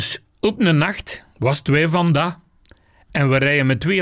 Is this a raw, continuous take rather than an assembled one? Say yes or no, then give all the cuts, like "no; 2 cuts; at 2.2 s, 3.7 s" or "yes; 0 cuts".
yes; 0 cuts